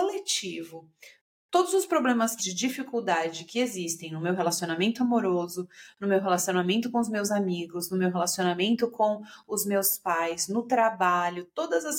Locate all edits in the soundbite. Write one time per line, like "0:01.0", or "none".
0:02.4